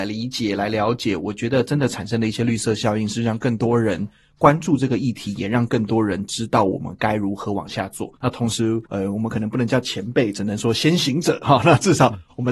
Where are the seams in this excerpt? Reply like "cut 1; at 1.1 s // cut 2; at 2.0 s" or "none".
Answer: cut 1; at 8.2 s // cut 2; at 8.9 s